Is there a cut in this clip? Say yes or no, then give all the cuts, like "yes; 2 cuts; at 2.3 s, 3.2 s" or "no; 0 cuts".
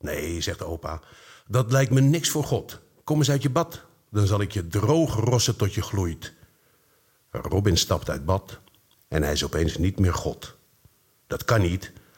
no; 0 cuts